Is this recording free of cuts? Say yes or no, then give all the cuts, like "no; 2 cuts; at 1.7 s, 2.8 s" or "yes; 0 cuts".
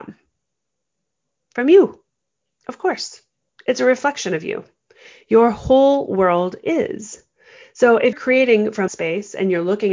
no; 2 cuts; at 8.1 s, 8.9 s